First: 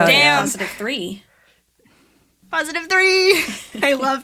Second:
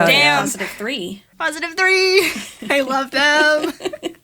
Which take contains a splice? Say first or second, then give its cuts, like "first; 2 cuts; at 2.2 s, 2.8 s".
second; 1 cut; at 1.3 s